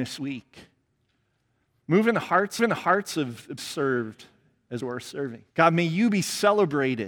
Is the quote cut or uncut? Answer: cut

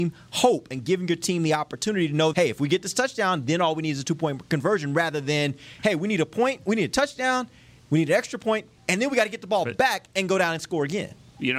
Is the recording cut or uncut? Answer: cut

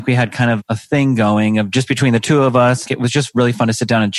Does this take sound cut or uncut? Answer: cut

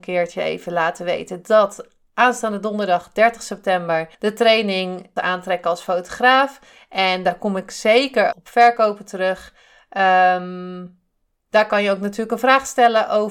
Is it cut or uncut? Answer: cut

